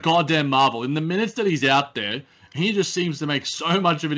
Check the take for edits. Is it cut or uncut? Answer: uncut